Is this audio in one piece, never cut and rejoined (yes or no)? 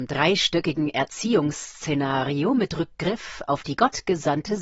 yes